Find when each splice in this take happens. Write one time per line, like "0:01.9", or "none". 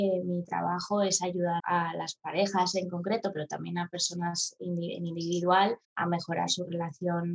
0:01.6
0:05.8